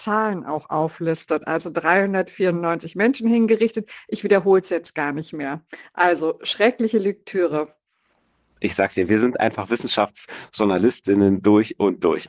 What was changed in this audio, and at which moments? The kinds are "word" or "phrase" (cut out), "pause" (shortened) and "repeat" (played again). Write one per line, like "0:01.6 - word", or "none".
none